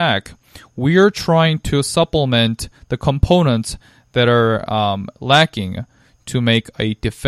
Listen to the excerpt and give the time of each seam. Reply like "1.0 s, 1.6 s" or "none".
none